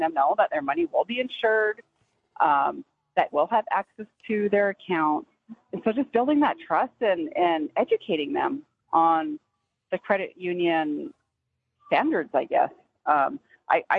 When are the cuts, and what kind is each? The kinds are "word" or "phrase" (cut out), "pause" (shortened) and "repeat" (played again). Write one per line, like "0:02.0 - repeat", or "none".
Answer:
0:03.3 - word

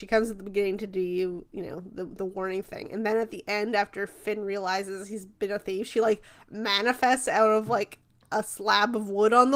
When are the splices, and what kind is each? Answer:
none

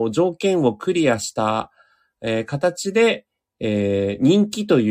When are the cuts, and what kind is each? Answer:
none

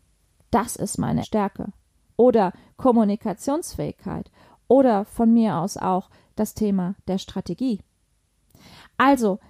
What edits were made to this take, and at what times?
0:01.2 - word

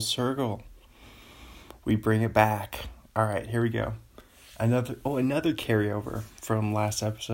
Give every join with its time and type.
none

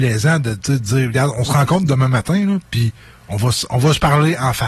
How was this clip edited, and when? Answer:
none

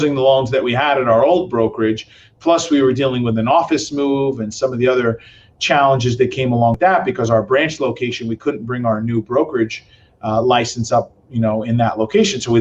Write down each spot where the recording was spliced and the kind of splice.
none

